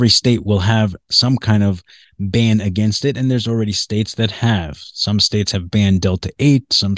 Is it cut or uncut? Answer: uncut